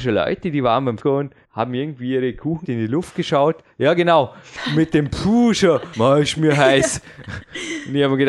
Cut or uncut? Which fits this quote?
cut